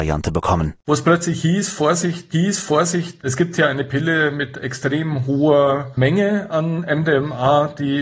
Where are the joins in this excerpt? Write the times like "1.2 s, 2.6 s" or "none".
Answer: 2.3 s